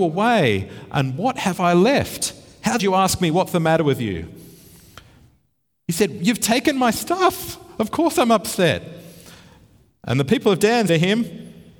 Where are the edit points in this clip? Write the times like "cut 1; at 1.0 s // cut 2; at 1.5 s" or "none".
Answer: cut 1; at 2.8 s // cut 2; at 10.9 s